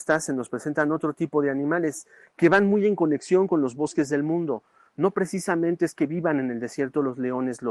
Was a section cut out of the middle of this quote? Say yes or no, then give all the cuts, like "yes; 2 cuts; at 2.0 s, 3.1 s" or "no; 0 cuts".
no; 0 cuts